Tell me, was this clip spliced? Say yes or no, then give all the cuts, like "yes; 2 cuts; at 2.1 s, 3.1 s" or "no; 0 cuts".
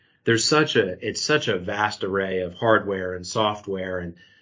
no; 0 cuts